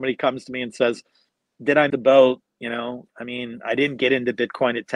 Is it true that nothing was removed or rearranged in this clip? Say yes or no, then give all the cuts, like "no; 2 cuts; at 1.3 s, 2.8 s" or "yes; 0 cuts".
no; 1 cut; at 1.9 s